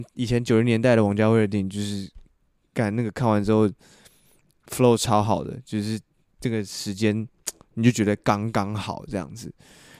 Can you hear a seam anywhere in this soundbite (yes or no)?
no